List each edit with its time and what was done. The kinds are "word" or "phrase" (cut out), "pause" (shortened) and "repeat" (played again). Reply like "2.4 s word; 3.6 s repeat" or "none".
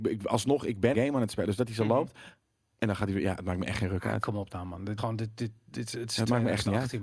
0.9 s word; 5.0 s word